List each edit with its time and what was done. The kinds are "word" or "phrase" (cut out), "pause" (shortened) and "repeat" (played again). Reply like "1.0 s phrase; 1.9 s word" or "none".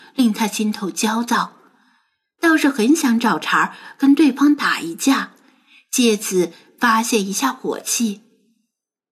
none

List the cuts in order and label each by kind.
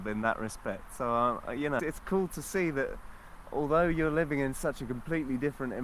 1.8 s word

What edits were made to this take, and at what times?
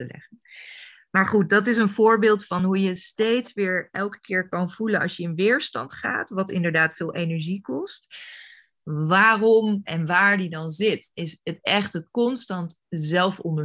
none

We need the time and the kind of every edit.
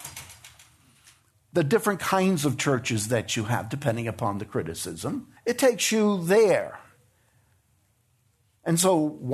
5.4 s pause

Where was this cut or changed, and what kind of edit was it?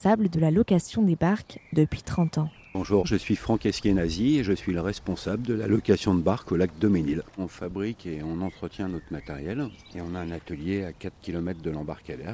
none

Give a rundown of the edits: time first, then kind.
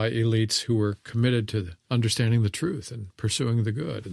1.8 s pause

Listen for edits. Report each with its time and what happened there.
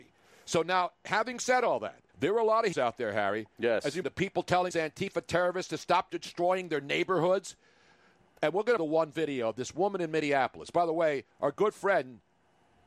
2.1 s pause; 2.7 s word; 4.0 s word; 4.7 s word; 8.8 s phrase; 11.3 s pause

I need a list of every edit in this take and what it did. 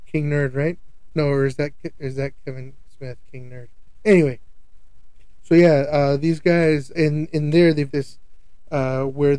5.4 s word; 6.9 s word; 7.9 s word

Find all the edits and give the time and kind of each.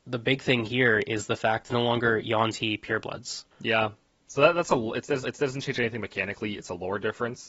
1.7 s phrase; 3.5 s pause; 5.2 s repeat

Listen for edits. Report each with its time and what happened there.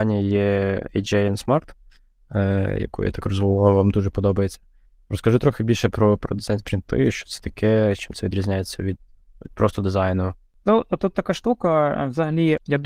none

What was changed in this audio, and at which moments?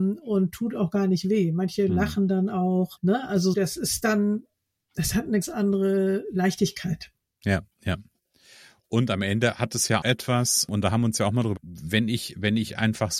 3.0 s word; 3.5 s word; 5.4 s word; 10.0 s word; 10.7 s word; 11.6 s word

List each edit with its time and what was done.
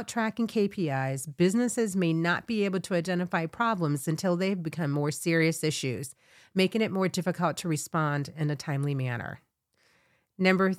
none

